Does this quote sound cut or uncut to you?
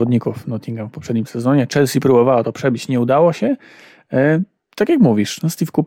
uncut